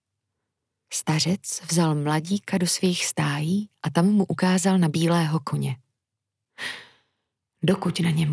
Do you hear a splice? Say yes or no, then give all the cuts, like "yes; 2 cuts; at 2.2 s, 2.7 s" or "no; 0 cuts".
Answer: no; 0 cuts